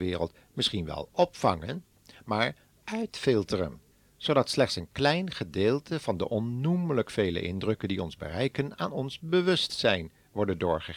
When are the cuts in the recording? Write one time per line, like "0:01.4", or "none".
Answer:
0:03.9